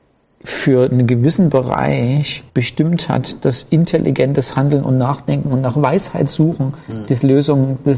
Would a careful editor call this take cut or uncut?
cut